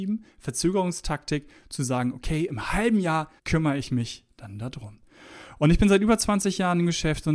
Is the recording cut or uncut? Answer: cut